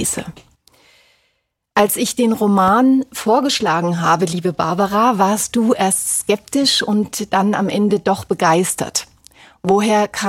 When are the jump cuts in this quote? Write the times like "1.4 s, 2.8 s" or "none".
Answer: none